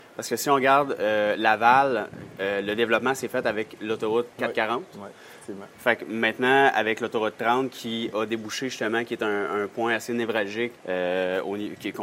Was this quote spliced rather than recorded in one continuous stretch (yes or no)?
yes